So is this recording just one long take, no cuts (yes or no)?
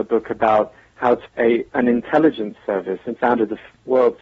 no